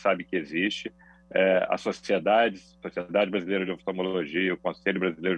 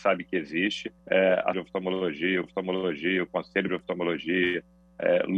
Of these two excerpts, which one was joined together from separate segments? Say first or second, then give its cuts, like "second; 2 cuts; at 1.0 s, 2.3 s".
second; 4 cuts; at 1.0 s, 1.5 s, 2.4 s, 3.7 s